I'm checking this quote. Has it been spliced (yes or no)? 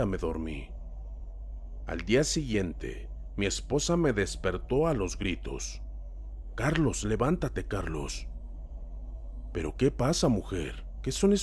no